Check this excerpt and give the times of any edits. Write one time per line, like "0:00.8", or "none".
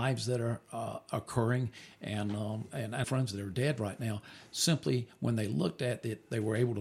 0:03.0